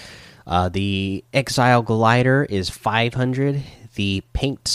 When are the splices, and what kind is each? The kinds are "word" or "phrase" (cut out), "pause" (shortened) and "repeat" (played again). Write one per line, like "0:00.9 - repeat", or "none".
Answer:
0:01.3 - pause